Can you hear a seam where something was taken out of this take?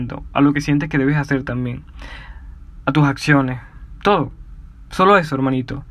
no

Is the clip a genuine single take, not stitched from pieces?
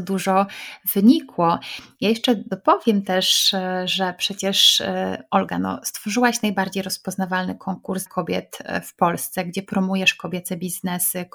no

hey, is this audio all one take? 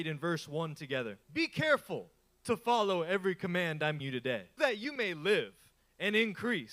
no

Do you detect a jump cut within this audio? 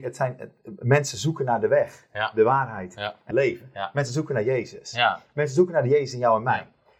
yes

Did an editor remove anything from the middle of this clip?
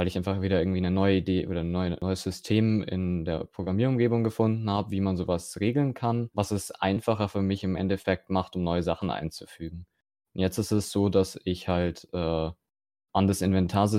no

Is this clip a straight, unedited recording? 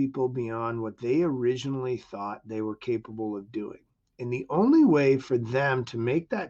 yes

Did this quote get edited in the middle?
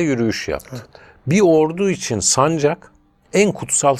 no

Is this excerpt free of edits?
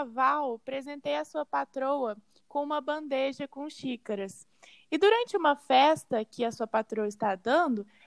yes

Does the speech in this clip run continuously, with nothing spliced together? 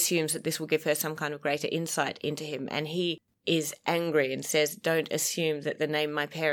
yes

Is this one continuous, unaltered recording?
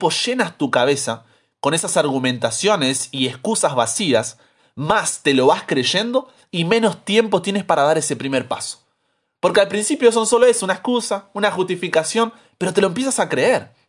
yes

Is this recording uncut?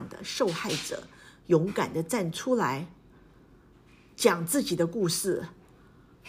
yes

